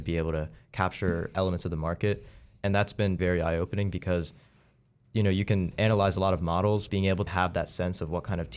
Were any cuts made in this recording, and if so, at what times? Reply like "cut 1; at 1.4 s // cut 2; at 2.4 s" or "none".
cut 1; at 3.2 s // cut 2; at 6.9 s // cut 3; at 7.3 s